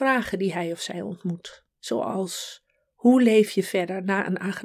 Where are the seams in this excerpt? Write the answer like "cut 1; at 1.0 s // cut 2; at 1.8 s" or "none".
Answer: cut 1; at 1.7 s